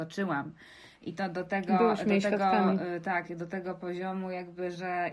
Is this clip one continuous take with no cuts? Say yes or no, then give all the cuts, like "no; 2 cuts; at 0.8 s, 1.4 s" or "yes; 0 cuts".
yes; 0 cuts